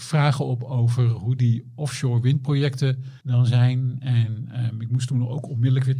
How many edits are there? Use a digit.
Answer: 1